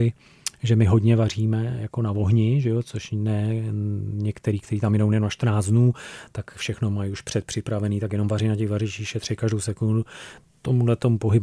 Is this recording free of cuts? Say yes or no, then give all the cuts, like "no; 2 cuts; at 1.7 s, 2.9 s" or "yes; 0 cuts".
yes; 0 cuts